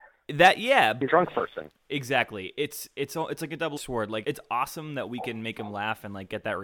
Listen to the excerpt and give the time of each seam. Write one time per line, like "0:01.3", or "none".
0:01.1
0:03.8
0:04.2